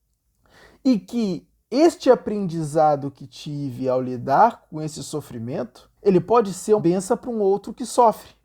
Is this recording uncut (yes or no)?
no